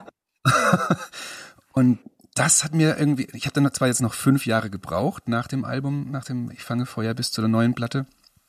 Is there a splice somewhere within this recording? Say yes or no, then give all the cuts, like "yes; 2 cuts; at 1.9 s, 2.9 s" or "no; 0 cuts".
no; 0 cuts